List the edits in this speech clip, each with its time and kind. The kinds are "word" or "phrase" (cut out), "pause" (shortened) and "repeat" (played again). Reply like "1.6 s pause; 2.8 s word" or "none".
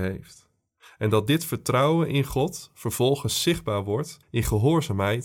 4.2 s pause